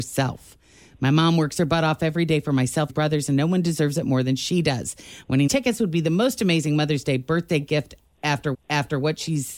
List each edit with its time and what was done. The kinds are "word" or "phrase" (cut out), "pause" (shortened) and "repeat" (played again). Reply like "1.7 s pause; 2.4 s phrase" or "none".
2.9 s phrase; 5.5 s word; 8.5 s repeat

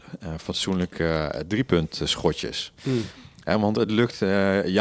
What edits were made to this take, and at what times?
none

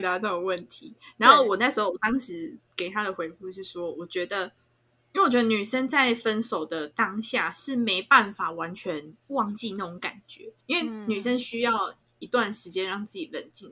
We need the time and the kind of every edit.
10.6 s pause

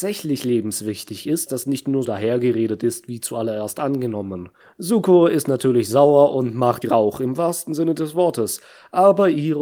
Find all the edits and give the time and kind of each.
1.5 s phrase; 2.0 s word; 4.6 s pause; 6.8 s word

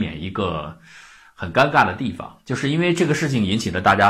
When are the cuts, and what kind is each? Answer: none

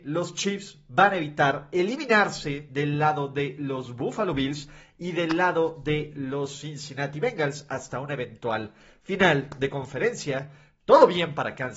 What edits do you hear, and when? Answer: none

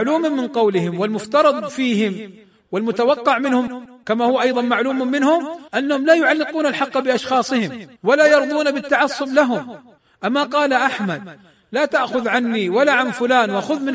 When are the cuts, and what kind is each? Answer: 5.7 s pause; 8.0 s pause; 10.0 s pause

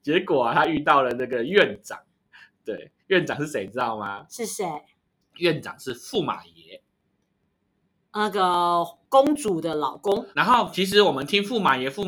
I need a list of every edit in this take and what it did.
3.0 s pause; 10.3 s word

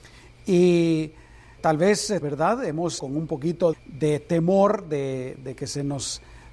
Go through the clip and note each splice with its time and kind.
1.6 s word; 2.2 s word; 3.0 s word; 3.7 s word

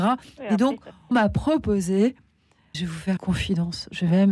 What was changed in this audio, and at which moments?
1.1 s word; 2.7 s word; 3.2 s word

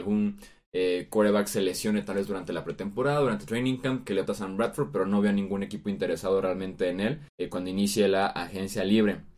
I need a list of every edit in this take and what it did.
4.3 s phrase; 7.3 s pause

